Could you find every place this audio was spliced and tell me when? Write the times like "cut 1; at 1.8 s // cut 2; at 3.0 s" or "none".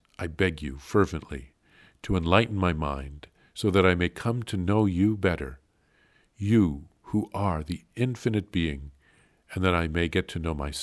none